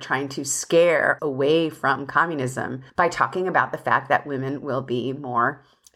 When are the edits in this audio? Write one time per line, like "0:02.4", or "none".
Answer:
0:01.2
0:02.9